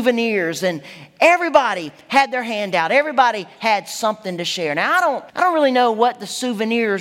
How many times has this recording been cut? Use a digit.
1